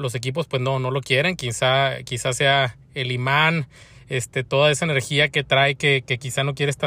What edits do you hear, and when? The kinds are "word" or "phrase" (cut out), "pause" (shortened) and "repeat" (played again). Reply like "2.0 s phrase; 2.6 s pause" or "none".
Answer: none